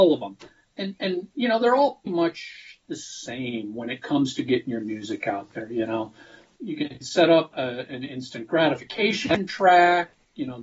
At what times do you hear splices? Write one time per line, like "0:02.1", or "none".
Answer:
0:02.1
0:06.6
0:07.5